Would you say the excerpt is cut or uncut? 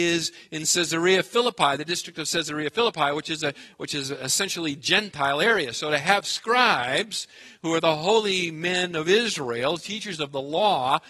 uncut